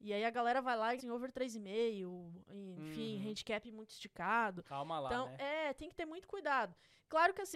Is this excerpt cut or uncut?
cut